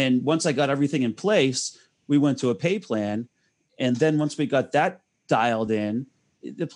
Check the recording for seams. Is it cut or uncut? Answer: uncut